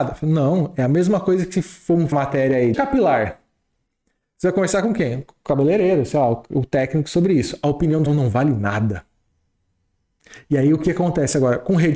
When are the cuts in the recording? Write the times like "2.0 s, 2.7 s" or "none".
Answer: 2.1 s, 2.7 s, 8.1 s

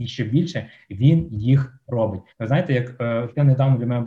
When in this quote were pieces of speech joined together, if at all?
2.3 s

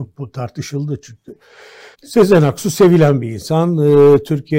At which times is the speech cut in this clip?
1.9 s

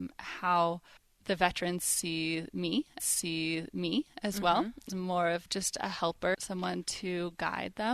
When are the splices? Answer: 1.0 s, 3.0 s, 4.9 s, 5.5 s, 6.3 s

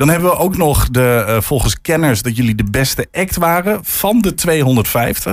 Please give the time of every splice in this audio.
none

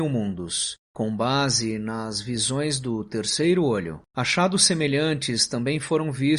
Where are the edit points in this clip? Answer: 4.1 s

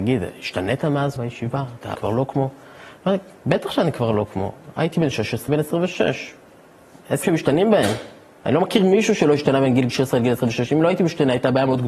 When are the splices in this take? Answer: 1.2 s, 1.9 s, 5.5 s, 7.2 s

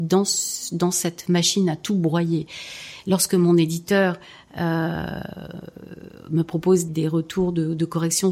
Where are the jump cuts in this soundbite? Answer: 6.9 s

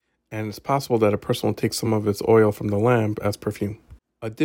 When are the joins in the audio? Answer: none

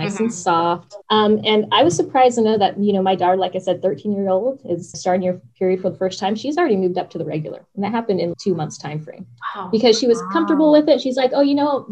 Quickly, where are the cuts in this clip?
1.0 s, 4.9 s, 5.5 s, 8.3 s

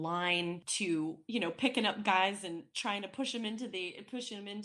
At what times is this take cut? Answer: none

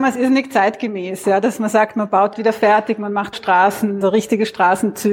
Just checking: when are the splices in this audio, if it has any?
2.3 s, 3.3 s, 4.0 s

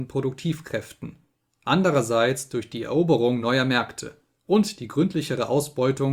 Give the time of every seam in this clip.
none

